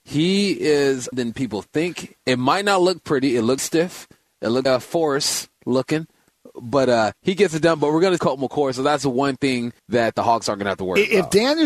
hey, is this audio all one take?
no; 6 cuts; at 1.1 s, 3.6 s, 4.7 s, 7.1 s, 8.2 s, 9.8 s

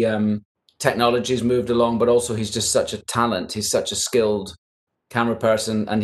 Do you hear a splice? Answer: no; 0 cuts

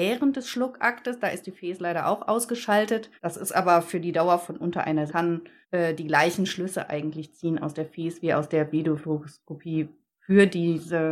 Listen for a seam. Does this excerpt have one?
yes; 3 cuts; at 3.2 s, 5.1 s, 5.6 s

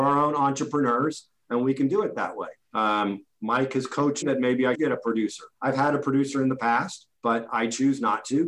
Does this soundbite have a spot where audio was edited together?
yes; 5 cuts; at 2.6 s, 4.2 s, 4.7 s, 5.5 s, 7.2 s

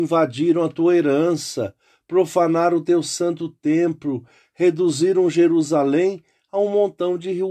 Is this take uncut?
yes; 0 cuts

